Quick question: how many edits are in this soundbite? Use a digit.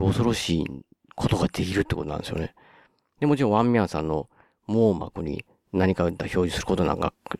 0